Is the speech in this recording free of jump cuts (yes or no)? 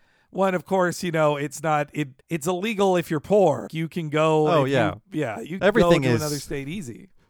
no